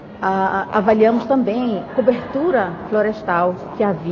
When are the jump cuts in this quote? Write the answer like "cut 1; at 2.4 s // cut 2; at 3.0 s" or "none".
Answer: cut 1; at 1.9 s